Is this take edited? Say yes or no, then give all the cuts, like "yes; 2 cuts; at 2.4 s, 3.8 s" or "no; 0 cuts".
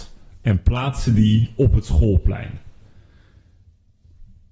no; 0 cuts